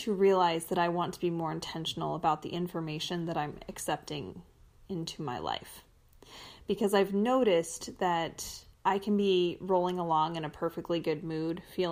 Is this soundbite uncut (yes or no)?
no